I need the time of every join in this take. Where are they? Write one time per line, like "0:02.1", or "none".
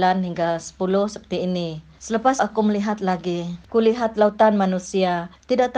0:02.4